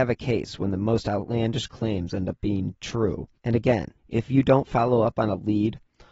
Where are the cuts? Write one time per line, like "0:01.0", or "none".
0:03.4
0:04.0